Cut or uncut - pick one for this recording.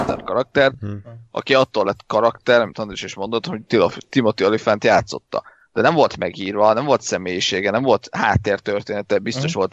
uncut